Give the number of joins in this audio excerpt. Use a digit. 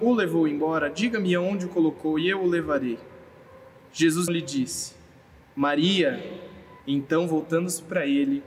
2